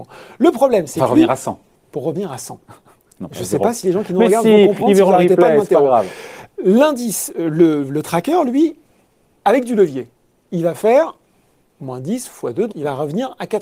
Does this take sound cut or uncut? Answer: cut